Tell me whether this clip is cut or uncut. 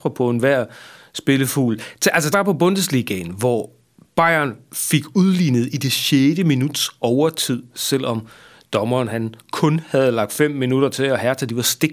cut